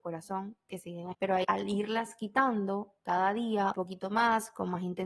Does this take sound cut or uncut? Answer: cut